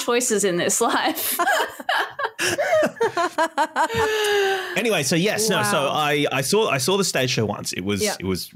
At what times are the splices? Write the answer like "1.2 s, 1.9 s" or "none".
none